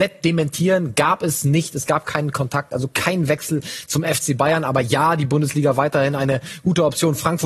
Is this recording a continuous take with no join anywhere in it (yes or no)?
yes